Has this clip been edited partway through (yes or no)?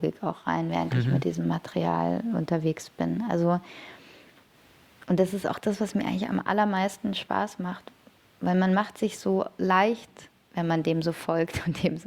no